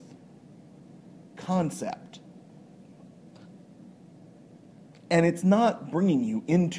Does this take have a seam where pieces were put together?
no; 0 cuts

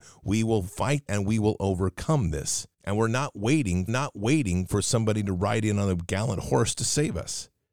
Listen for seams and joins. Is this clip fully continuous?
no; 3 cuts; at 1.1 s, 2.7 s, 3.9 s

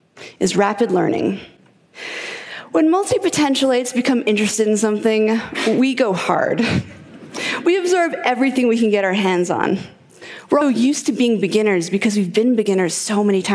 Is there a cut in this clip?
yes; 1 cut; at 10.6 s

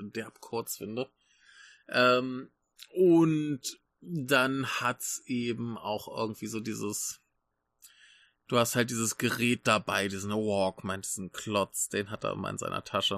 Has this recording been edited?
no; 0 cuts

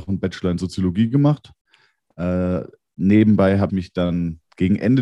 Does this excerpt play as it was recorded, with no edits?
no; 1 cut; at 3.7 s

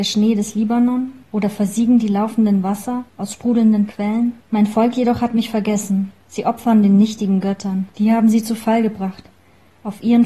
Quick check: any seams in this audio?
yes; 5 cuts; at 1.2 s, 3.1 s, 4.4 s, 6.2 s, 7.9 s

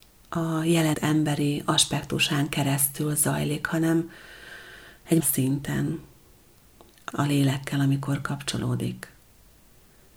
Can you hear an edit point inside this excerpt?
yes; 3 cuts; at 0.9 s, 5.2 s, 7.1 s

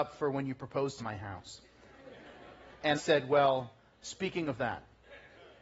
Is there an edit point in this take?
yes; 2 cuts; at 1.0 s, 2.9 s

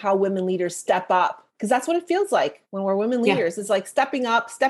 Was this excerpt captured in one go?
yes; 0 cuts

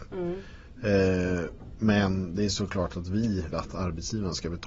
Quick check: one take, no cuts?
no; 1 cut; at 3.5 s

